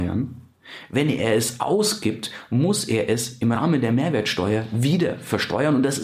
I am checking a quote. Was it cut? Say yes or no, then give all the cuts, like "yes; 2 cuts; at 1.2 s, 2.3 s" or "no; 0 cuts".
no; 0 cuts